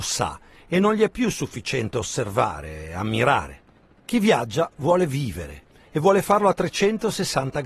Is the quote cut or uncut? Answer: uncut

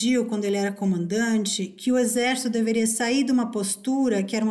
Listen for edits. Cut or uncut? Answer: uncut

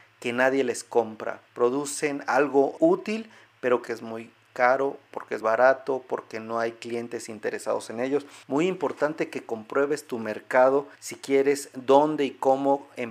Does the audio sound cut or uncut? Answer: cut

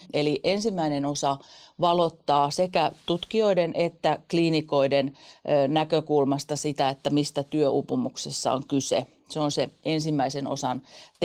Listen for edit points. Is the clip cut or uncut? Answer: uncut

